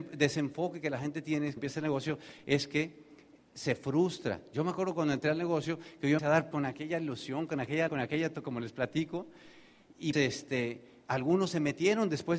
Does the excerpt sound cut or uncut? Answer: cut